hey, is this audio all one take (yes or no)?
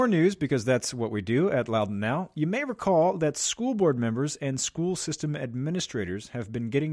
yes